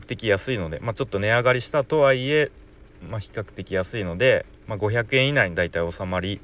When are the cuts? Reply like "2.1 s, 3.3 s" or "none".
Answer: none